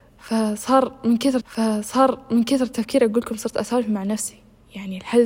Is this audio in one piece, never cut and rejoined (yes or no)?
no